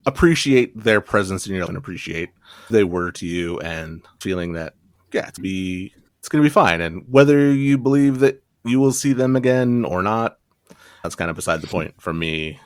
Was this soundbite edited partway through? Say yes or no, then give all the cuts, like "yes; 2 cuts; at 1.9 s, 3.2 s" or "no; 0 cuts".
yes; 6 cuts; at 1.7 s, 2.7 s, 4.2 s, 5.4 s, 6.1 s, 11.0 s